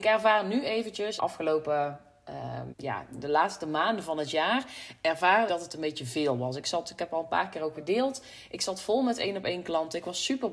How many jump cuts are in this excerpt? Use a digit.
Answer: 4